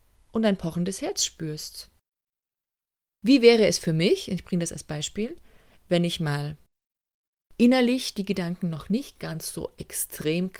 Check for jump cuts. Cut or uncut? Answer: uncut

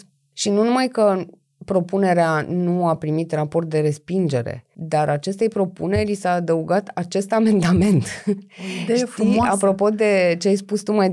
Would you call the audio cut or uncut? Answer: uncut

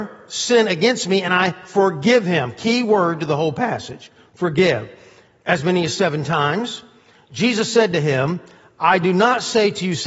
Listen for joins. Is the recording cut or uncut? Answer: uncut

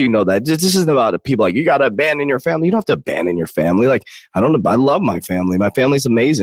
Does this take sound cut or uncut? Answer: uncut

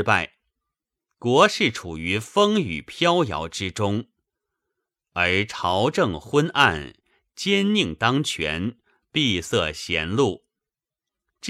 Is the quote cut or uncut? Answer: uncut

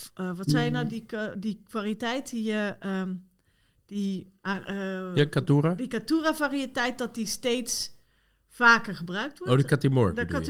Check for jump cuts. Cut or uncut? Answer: uncut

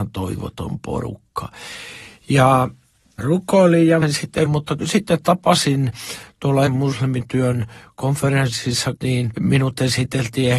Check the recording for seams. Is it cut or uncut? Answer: cut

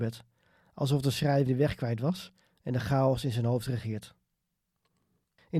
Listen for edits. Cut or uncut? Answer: cut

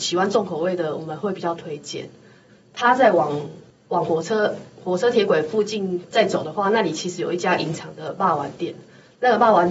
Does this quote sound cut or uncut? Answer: uncut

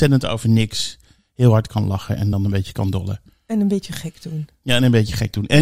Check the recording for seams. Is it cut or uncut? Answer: uncut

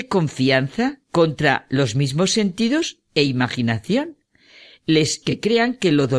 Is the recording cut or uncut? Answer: cut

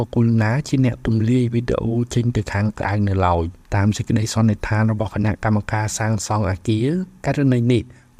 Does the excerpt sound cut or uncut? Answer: cut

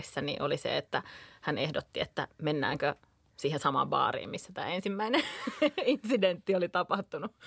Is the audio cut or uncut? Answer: uncut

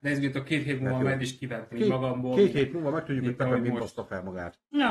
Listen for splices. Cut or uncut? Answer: cut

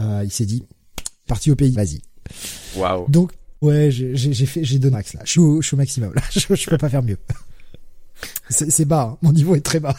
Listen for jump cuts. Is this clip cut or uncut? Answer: cut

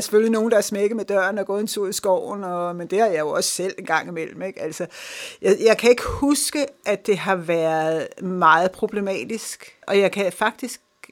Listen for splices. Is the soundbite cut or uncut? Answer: cut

